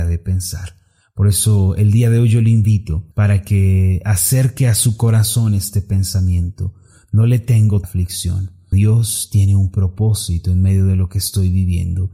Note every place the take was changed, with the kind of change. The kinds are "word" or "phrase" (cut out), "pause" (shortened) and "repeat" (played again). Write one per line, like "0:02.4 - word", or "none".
0:03.1 - pause
0:07.8 - phrase
0:08.7 - word